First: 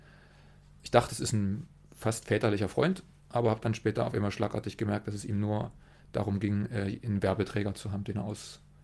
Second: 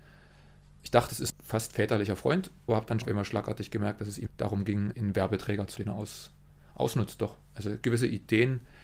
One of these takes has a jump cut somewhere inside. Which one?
second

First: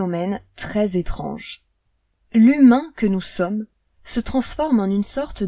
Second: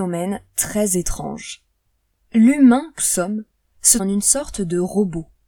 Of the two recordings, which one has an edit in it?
second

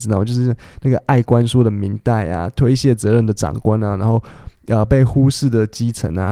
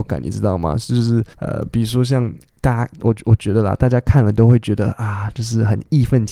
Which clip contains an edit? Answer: second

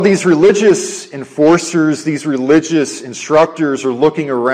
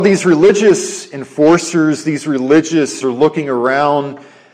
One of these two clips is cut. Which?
second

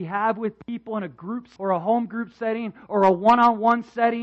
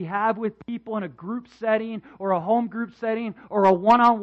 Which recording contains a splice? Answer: first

